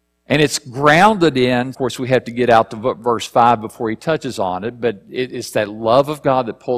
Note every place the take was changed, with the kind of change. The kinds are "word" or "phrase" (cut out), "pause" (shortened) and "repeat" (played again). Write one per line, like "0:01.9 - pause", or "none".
0:01.7 - phrase